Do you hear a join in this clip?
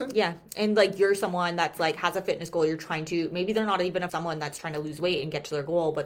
yes; 1 cut; at 4.1 s

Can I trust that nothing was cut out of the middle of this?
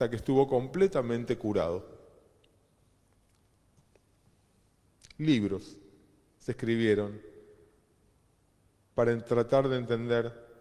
yes; 0 cuts

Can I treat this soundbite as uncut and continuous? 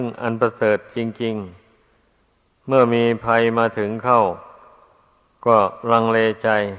yes; 0 cuts

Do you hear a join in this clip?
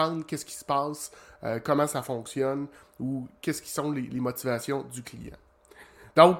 no; 0 cuts

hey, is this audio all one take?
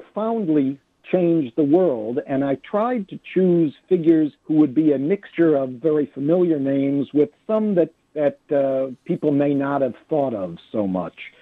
no; 2 cuts; at 4.4 s, 8.0 s

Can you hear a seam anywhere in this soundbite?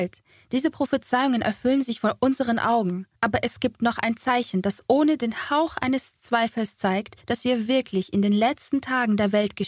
yes; 2 cuts; at 3.1 s, 7.2 s

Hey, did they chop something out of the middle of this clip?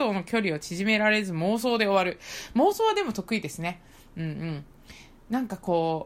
no; 0 cuts

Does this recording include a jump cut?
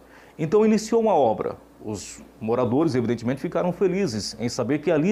no; 0 cuts

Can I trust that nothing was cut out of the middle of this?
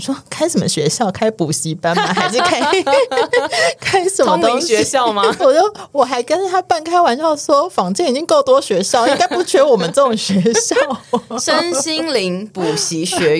no; 1 cut; at 5.4 s

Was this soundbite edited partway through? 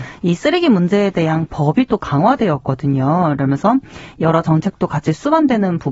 no; 0 cuts

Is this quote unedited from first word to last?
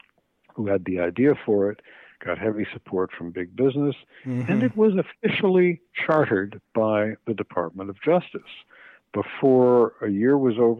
yes; 0 cuts

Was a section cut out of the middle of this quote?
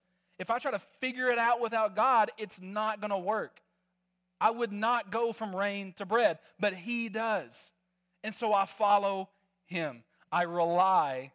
no; 0 cuts

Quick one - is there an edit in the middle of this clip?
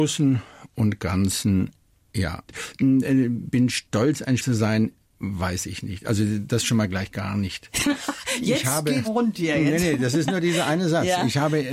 yes; 2 cuts; at 4.4 s, 9.0 s

